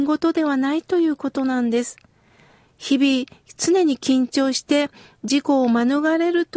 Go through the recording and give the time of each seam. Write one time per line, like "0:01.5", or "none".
none